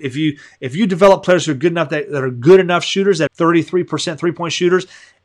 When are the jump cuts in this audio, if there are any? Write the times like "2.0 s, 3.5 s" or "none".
3.3 s

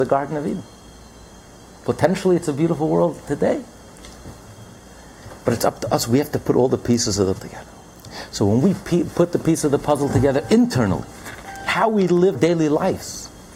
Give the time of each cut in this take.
5.4 s, 7.4 s, 12.3 s

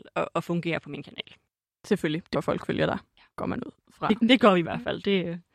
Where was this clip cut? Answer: 1.5 s, 2.3 s, 3.3 s, 4.6 s

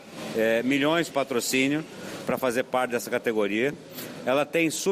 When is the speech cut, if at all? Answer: 1.1 s

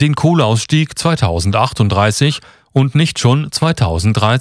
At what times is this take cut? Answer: none

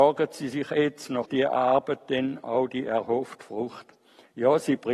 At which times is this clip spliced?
1.3 s

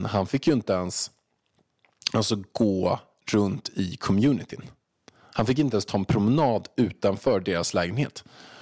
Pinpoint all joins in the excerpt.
none

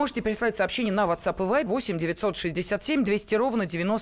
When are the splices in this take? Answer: 1.7 s

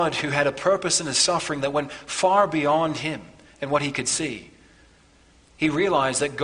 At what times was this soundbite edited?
none

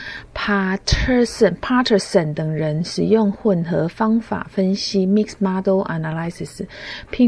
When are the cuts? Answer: none

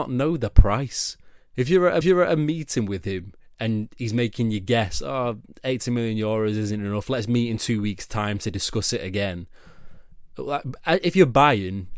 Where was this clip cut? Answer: 2.0 s

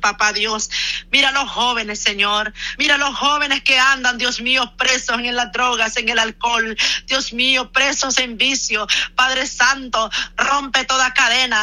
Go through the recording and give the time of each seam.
none

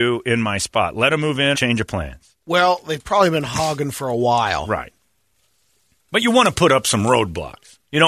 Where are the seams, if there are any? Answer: 1.5 s, 2.4 s

